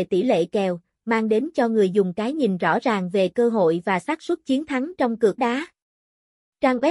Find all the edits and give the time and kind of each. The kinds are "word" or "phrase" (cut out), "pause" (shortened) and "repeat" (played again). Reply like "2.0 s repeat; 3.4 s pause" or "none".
5.4 s word